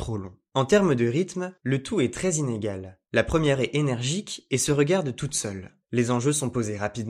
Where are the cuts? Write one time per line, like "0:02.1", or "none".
0:03.6